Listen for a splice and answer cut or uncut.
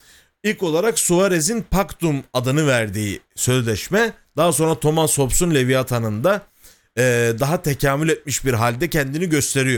uncut